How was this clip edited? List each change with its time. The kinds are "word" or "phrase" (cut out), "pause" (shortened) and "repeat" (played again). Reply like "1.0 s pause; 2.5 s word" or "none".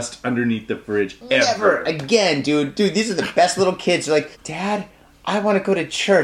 4.3 s pause